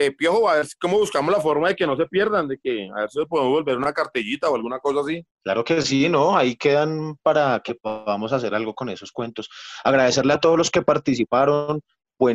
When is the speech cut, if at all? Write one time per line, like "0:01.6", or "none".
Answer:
none